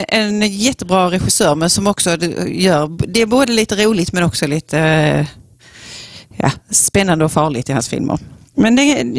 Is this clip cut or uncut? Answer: uncut